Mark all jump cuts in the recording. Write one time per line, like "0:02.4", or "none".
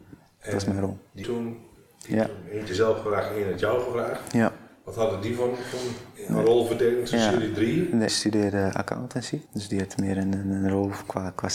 0:01.2
0:02.7
0:08.1
0:09.5

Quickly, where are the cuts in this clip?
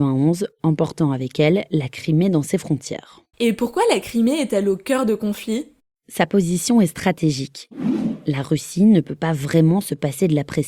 none

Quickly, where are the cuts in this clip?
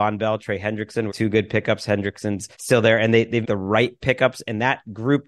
0:01.1
0:02.5
0:03.4

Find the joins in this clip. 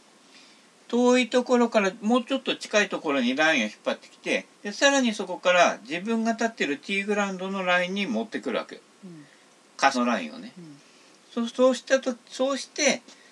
0:04.5
0:09.9
0:11.5

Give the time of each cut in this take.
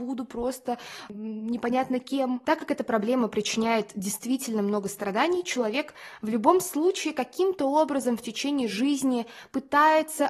none

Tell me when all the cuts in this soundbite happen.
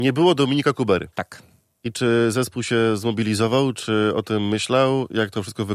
0:01.1

